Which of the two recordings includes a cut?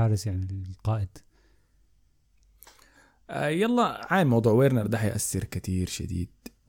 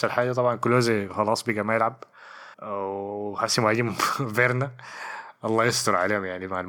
second; 1 cut; at 2.5 s

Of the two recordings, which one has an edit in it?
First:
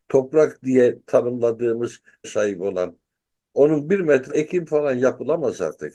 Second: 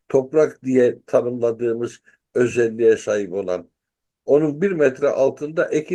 first; 2 cuts; at 2.2 s, 4.3 s

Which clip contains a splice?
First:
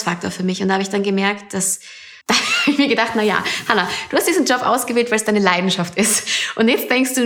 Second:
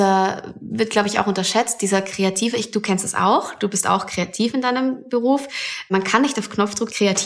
first; 1 cut; at 2.2 s

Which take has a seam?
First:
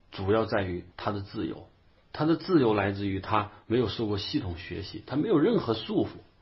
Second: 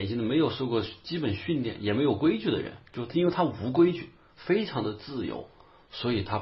first; 1 cut; at 0.9 s

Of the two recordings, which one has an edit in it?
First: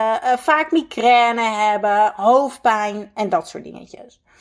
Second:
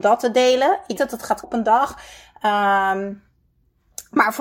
second; 2 cuts; at 1.0 s, 1.4 s

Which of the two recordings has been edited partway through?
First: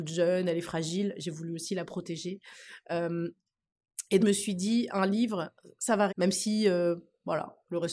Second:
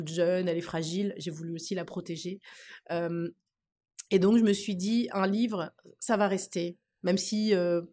first; 2 cuts; at 4.2 s, 6.1 s

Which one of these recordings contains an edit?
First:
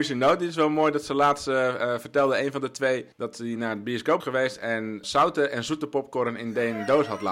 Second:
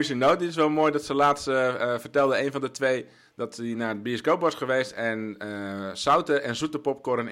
first; 3 cuts; at 3.1 s, 4.2 s, 5.0 s

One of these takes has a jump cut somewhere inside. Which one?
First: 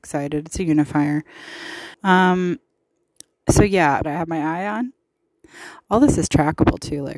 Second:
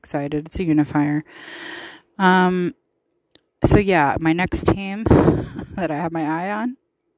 first; 2 cuts; at 1.9 s, 4.0 s

